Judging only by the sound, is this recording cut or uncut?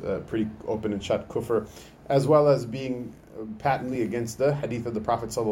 uncut